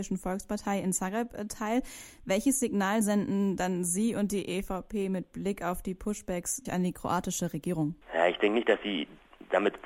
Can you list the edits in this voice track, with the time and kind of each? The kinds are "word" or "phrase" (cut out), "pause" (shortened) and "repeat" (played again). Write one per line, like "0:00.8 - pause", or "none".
0:06.7 - word